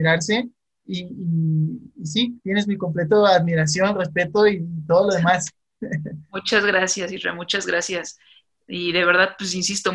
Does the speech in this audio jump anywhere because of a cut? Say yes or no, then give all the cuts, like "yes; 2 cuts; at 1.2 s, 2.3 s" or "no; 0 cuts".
no; 0 cuts